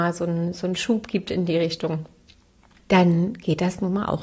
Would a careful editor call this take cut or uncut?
uncut